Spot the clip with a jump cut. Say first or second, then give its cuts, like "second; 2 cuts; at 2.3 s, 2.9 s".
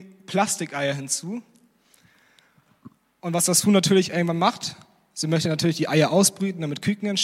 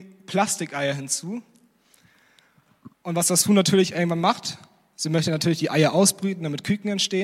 second; 1 cut; at 2.9 s